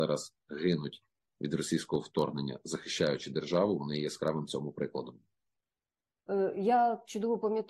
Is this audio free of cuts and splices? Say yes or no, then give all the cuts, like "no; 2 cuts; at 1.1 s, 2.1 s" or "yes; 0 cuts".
yes; 0 cuts